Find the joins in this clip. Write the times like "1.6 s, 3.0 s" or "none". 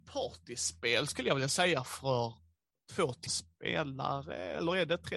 3.3 s